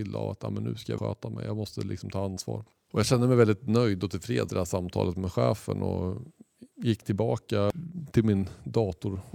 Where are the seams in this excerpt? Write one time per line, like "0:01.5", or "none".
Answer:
0:01.0
0:04.5
0:06.7